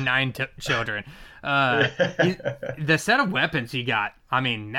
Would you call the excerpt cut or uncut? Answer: uncut